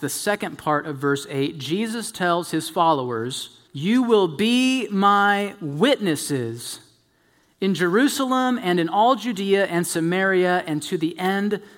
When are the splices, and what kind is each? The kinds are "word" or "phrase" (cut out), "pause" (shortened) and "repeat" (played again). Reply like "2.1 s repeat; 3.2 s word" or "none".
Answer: 3.7 s pause